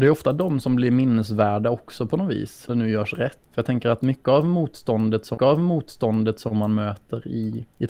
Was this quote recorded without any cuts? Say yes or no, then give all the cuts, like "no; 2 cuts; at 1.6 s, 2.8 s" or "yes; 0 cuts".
no; 2 cuts; at 2.7 s, 5.4 s